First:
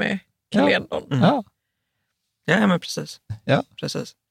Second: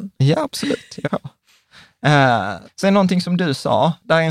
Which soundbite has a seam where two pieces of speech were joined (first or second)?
second